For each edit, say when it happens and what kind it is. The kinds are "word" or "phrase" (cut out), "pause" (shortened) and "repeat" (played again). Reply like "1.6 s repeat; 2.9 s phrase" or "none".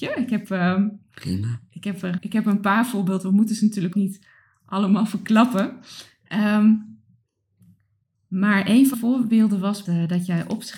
2.2 s word; 3.9 s word; 8.9 s word; 9.8 s word